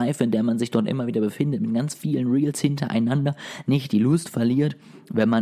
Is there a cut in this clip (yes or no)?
no